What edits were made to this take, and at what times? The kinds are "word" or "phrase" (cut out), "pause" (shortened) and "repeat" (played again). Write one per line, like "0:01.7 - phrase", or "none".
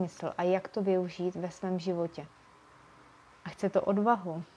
none